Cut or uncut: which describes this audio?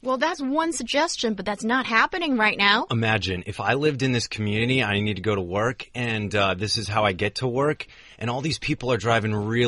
uncut